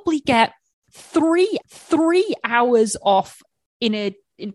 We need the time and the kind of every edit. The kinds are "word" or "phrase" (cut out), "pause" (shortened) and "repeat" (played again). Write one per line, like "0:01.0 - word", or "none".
0:01.6 - repeat